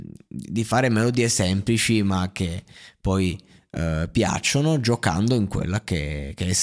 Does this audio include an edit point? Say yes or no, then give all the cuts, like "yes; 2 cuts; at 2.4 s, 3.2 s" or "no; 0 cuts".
no; 0 cuts